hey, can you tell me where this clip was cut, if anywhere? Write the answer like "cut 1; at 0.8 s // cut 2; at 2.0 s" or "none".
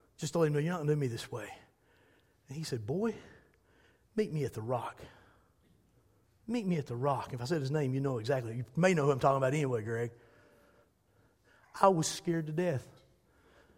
none

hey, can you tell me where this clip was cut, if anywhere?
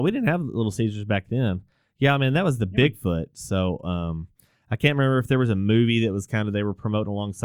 none

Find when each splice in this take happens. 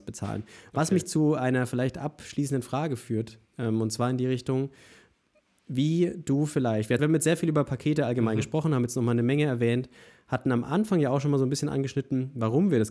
cut 1; at 3.4 s // cut 2; at 7.0 s

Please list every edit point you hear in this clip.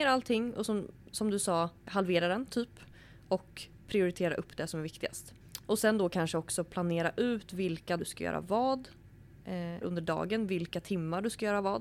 cut 1; at 1.9 s // cut 2; at 8.0 s // cut 3; at 9.8 s

